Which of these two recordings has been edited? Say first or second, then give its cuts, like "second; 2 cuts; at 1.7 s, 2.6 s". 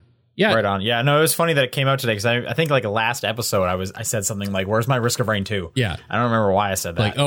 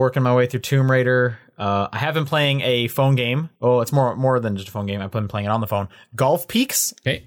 second; 1 cut; at 3.6 s